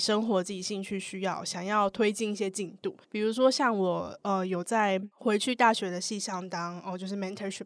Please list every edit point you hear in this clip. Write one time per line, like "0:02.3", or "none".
0:03.0
0:05.1